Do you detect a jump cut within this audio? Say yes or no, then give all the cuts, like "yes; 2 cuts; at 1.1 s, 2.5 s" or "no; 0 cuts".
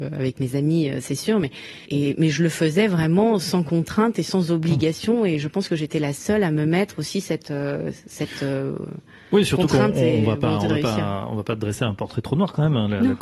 yes; 1 cut; at 1.9 s